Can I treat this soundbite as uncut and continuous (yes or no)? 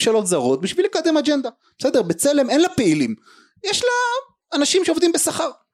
yes